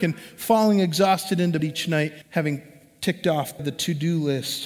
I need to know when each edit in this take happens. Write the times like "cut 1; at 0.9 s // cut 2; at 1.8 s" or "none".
cut 1; at 1.6 s // cut 2; at 2.2 s // cut 3; at 3.6 s